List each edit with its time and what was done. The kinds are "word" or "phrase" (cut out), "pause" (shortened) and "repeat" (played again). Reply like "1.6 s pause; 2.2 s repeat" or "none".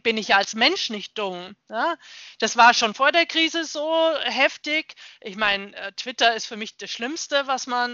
1.6 s pause